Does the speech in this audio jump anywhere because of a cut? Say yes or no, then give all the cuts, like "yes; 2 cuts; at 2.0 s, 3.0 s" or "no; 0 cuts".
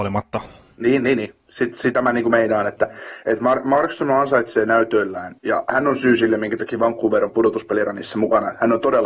yes; 1 cut; at 5.4 s